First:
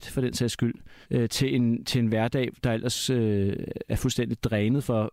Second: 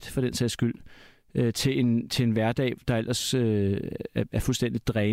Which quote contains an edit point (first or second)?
first